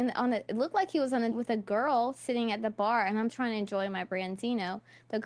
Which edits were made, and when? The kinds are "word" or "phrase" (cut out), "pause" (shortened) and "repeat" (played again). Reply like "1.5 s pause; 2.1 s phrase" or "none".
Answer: 1.3 s word; 3.3 s word